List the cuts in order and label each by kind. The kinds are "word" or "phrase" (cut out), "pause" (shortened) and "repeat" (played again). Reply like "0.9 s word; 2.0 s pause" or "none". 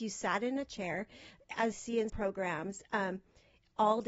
1.7 s word; 2.1 s word